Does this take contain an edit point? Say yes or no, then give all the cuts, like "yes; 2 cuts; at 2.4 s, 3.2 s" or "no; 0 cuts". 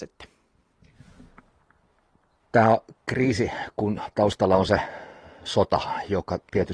no; 0 cuts